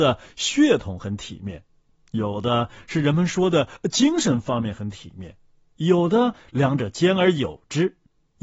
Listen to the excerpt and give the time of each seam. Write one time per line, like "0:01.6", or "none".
none